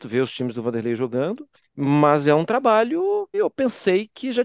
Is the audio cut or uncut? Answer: cut